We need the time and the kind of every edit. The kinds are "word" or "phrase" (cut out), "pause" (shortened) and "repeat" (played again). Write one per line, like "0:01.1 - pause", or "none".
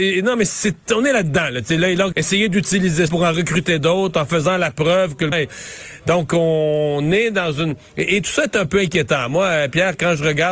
0:02.1 - phrase
0:03.1 - word
0:05.3 - word

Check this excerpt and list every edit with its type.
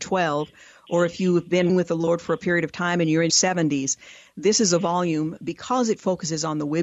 0:01.7 - word
0:03.3 - word

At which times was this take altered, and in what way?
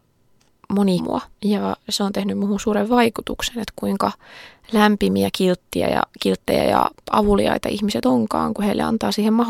0:01.0 - phrase
0:01.3 - pause

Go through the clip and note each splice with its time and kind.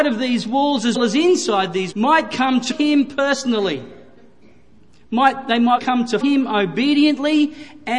0:00.9 - word
0:01.9 - word
0:02.7 - word
0:05.8 - word
0:06.2 - word

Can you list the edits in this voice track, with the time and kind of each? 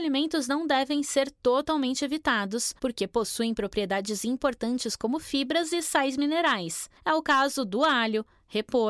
0:02.8 - pause
0:07.0 - pause

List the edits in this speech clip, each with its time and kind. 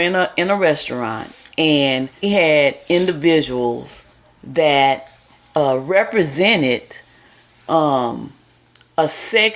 0:02.2 - word

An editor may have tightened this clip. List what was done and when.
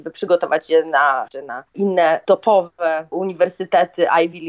0:01.3 - word
0:01.7 - pause

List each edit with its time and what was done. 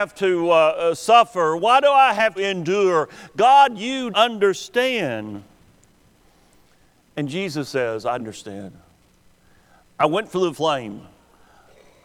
0:02.4 - word
0:04.1 - word
0:08.2 - word
0:10.5 - word

